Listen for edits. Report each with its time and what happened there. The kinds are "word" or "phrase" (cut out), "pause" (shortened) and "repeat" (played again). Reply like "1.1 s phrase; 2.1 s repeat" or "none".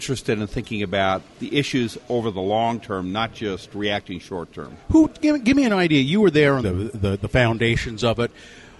6.6 s phrase